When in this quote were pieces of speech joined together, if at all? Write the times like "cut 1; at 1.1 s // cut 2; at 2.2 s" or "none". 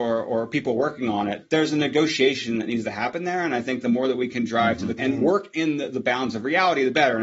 cut 1; at 5.0 s